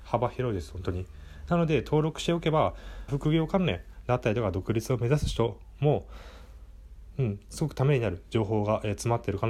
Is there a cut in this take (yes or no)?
yes